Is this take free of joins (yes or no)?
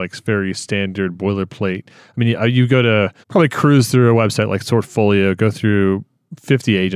no